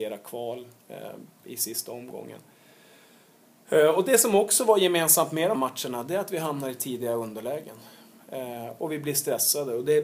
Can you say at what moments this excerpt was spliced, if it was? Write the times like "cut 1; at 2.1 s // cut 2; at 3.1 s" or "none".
cut 1; at 5.5 s